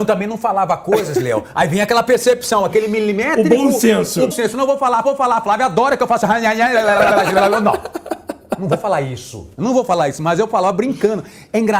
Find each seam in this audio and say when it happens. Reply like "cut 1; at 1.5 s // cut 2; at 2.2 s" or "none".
cut 1; at 4.3 s // cut 2; at 5.0 s // cut 3; at 9.5 s